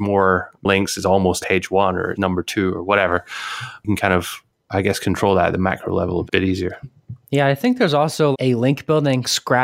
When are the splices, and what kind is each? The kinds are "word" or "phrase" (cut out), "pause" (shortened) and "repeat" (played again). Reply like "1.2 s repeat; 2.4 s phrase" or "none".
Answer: 1.4 s word; 2.1 s word; 6.3 s word; 8.3 s word

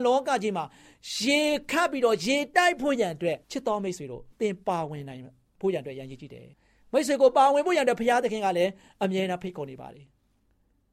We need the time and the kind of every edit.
3.4 s pause; 4.3 s pause; 6.5 s pause

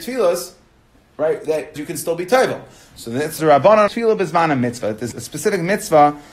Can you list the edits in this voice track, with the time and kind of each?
1.8 s word; 3.4 s word; 3.9 s word; 5.1 s word

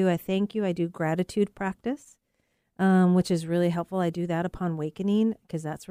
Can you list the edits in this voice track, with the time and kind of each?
none

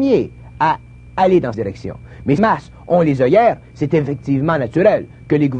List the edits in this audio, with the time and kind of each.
1.5 s word; 2.4 s phrase

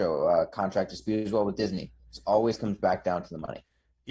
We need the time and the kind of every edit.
none

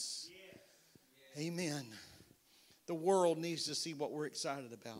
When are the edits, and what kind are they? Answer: none

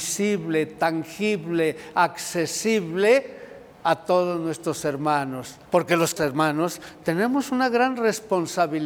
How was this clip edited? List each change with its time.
3.7 s pause; 5.7 s pause; 6.2 s word

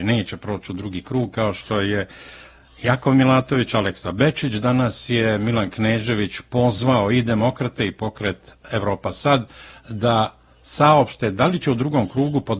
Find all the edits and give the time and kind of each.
none

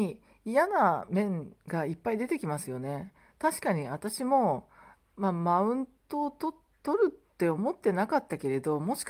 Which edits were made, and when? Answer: none

